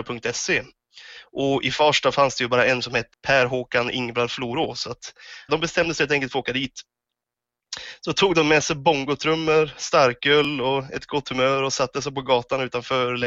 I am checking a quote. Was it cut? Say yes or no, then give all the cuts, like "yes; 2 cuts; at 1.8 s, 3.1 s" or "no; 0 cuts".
yes; 2 cuts; at 3.1 s, 5.5 s